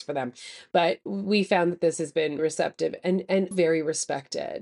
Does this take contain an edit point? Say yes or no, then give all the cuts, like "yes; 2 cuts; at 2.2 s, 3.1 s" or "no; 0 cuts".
yes; 2 cuts; at 2.4 s, 3.5 s